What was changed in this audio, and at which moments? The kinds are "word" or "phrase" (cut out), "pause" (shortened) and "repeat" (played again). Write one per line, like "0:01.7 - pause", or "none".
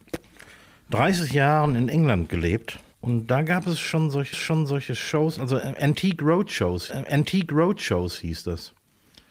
0:02.9 - pause
0:04.3 - repeat
0:06.9 - repeat

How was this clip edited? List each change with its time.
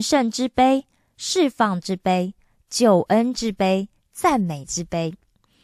none

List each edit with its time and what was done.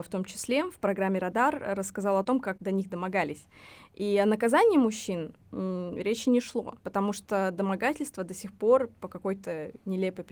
0:06.8 - pause

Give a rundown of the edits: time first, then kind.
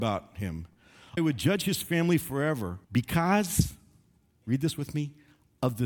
0:01.2 - phrase
0:02.8 - pause

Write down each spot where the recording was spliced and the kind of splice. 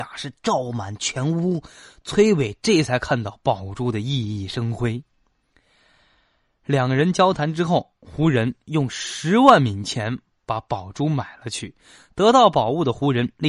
none

